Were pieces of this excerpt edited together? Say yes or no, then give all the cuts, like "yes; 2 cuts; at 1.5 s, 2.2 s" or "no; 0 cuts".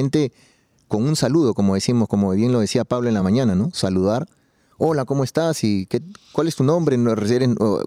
no; 0 cuts